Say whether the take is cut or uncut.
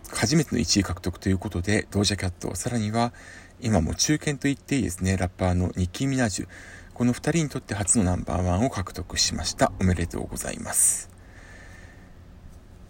uncut